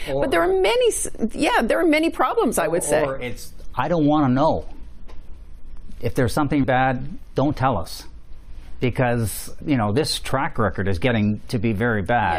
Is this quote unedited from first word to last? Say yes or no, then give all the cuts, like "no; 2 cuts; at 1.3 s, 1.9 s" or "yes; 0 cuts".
no; 2 cuts; at 6.6 s, 9.6 s